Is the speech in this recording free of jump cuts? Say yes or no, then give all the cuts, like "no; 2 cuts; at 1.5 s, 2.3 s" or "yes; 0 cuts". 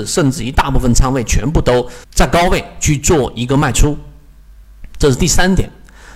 no; 1 cut; at 2.0 s